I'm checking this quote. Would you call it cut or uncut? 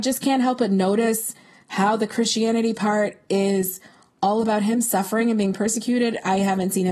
uncut